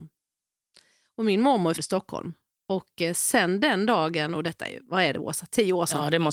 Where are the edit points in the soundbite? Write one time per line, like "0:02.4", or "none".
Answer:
0:01.7